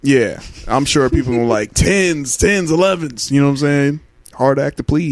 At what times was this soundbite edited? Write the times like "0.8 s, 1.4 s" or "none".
none